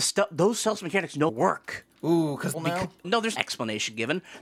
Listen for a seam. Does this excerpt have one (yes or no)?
yes